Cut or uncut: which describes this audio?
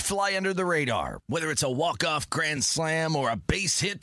uncut